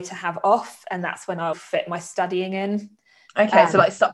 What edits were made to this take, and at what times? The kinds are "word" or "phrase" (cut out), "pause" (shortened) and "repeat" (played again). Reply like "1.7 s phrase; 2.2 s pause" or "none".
1.5 s word